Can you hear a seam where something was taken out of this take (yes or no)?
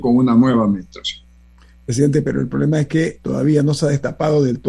no